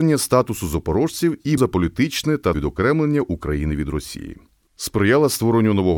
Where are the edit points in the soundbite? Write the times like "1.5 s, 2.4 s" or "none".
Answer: 1.6 s, 2.5 s